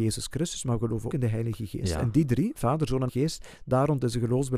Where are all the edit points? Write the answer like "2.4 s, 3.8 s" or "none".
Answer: 1.1 s, 3.1 s